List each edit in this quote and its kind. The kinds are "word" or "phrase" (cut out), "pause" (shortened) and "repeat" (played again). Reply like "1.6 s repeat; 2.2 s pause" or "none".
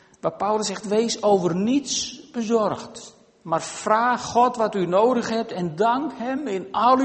none